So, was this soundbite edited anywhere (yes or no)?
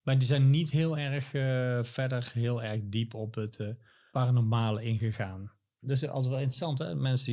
no